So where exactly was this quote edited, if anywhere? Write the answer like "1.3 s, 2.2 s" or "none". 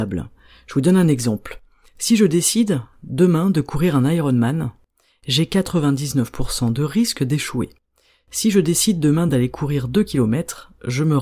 none